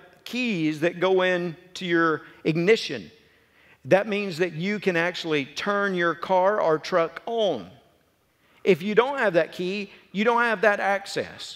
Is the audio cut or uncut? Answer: uncut